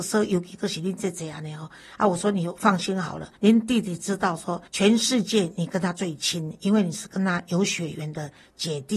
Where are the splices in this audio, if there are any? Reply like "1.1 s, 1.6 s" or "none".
3.4 s, 4.7 s